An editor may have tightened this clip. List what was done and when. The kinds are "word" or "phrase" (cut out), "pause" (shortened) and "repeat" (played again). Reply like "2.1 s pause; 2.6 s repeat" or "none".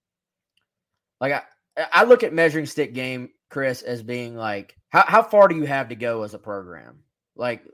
4.8 s pause